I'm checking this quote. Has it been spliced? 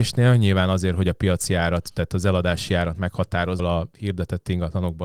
yes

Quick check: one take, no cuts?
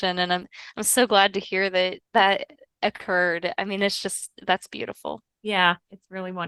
no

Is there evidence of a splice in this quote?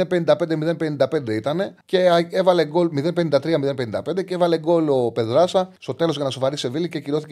yes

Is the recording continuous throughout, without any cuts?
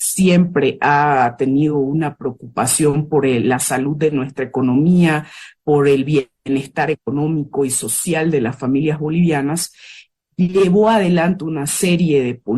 yes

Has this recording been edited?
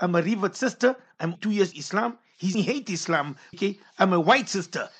yes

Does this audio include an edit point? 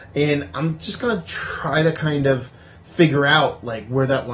no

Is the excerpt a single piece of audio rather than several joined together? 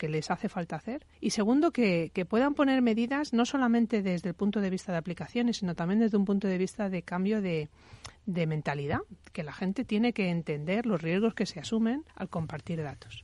no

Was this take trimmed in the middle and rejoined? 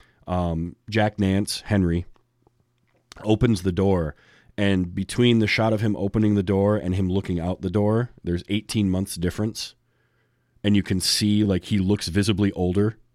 no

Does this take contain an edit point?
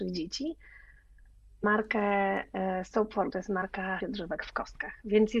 yes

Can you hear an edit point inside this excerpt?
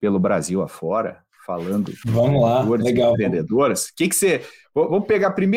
no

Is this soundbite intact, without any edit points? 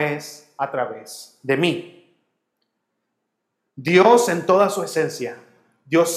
yes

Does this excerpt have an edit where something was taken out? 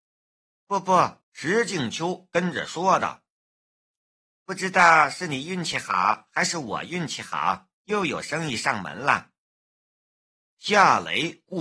yes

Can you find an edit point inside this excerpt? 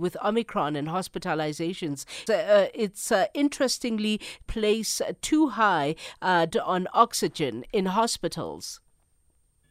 yes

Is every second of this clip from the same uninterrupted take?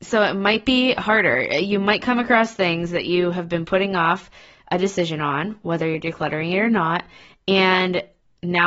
yes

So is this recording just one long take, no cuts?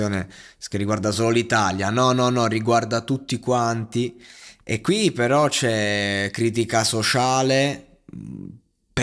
yes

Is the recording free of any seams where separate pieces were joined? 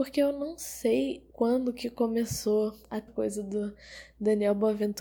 no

